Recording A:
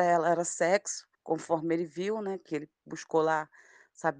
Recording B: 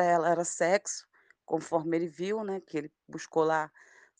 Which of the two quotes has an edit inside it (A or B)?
A